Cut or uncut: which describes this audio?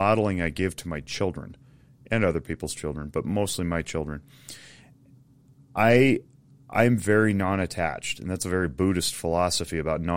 uncut